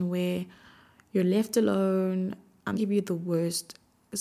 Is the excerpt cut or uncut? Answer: cut